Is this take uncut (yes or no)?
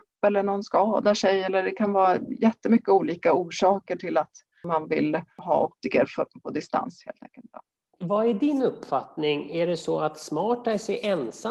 yes